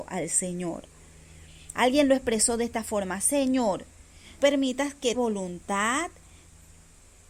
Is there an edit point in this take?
yes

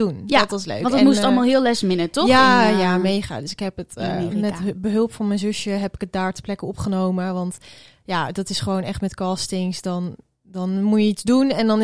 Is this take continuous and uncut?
yes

